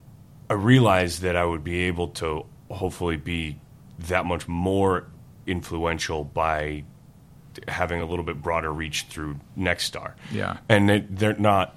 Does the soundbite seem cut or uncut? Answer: uncut